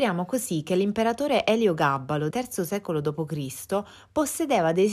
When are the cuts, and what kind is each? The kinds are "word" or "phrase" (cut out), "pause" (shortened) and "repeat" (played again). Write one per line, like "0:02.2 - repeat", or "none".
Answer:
0:02.3 - word